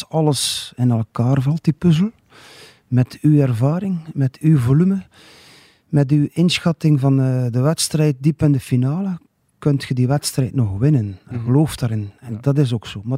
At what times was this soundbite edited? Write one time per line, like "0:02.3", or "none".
none